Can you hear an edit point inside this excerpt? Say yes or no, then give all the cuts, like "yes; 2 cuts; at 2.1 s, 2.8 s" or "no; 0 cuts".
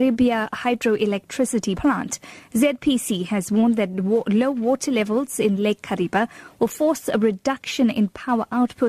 no; 0 cuts